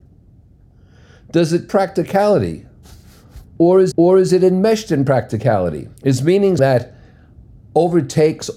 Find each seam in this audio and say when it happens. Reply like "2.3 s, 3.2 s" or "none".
1.7 s, 3.9 s, 6.0 s, 6.6 s